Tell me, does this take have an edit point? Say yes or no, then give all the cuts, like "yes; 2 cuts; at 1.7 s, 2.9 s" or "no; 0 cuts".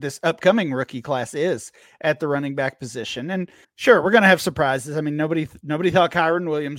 yes; 1 cut; at 3.6 s